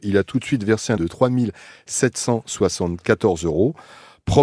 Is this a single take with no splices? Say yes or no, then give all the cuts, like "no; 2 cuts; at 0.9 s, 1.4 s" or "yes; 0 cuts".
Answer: no; 1 cut; at 1.0 s